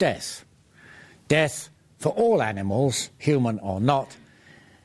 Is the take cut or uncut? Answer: uncut